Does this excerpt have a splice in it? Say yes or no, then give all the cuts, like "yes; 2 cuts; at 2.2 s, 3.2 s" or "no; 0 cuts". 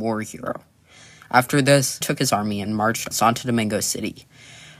yes; 2 cuts; at 2.0 s, 3.1 s